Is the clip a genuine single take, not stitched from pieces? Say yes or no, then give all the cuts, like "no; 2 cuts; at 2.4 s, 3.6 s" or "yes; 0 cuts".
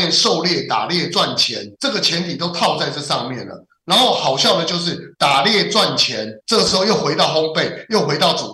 no; 3 cuts; at 1.7 s, 5.1 s, 6.4 s